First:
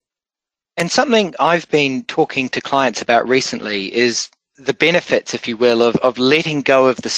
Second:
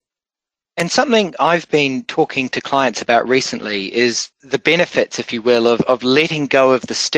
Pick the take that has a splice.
second; 1 cut; at 4.3 s

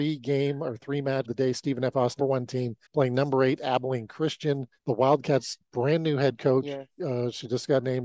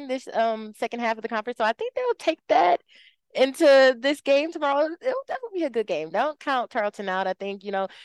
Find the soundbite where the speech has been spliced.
first; 4 cuts; at 1.2 s, 2.2 s, 2.9 s, 4.8 s

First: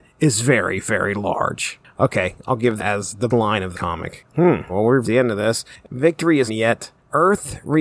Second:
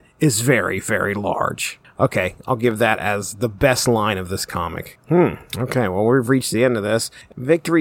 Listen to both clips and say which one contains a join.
first; 6 cuts; at 2.8 s, 3.3 s, 3.7 s, 4.7 s, 5.0 s, 6.5 s

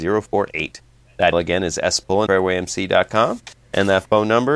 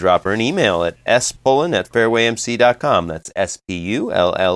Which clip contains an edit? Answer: first; 2 cuts; at 1.3 s, 2.3 s

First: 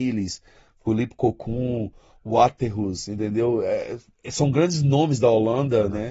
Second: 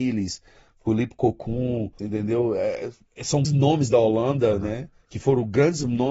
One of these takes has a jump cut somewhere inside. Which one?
second; 2 cuts; at 2.0 s, 3.4 s

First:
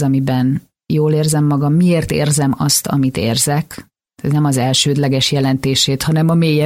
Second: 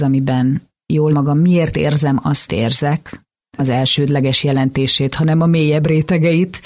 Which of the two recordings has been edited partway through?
second; 3 cuts; at 1.1 s, 2.5 s, 3.6 s

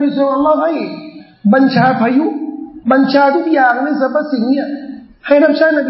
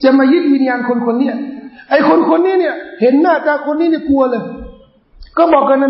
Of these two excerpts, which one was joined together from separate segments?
first; 1 cut; at 2.8 s

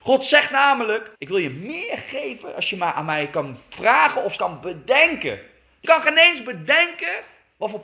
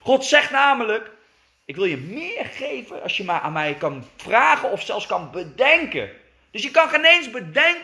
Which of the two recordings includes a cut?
first; 3 cuts; at 1.2 s, 4.4 s, 5.8 s

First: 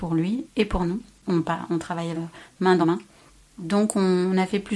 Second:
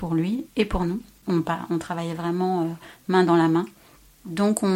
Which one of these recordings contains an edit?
first; 2 cuts; at 2.2 s, 2.8 s

